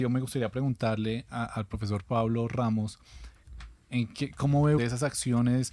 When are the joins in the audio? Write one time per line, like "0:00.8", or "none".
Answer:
0:04.8